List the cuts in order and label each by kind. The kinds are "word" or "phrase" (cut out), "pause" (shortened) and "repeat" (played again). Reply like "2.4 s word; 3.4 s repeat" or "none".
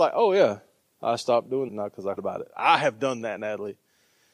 1.7 s word; 2.2 s word